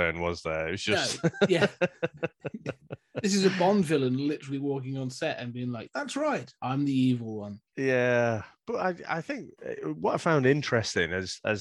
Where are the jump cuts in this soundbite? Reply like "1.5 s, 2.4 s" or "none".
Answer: 7.7 s